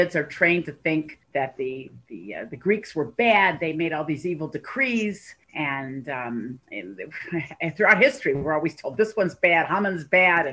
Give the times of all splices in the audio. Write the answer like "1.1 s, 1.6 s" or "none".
1.2 s, 5.4 s, 6.6 s